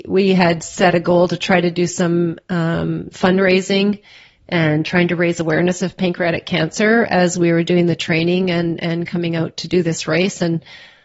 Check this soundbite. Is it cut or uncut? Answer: uncut